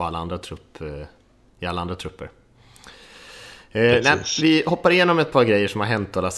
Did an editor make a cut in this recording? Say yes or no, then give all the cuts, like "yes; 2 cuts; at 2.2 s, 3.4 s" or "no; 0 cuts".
no; 0 cuts